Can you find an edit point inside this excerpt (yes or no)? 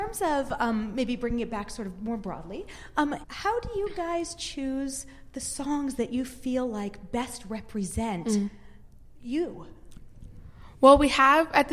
yes